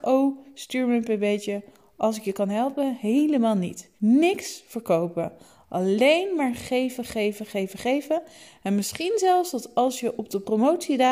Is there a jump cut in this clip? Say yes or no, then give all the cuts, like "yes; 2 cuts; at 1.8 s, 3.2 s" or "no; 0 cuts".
yes; 1 cut; at 4.0 s